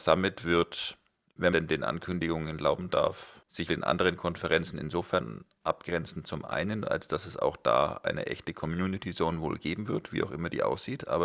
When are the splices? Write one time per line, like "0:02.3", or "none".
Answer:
0:01.5
0:03.7